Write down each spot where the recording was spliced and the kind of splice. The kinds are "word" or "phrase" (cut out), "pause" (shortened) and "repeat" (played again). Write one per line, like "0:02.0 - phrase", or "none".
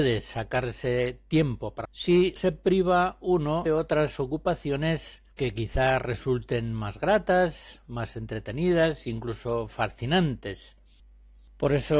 0:01.8 - phrase
0:02.4 - word
0:03.7 - word
0:05.3 - pause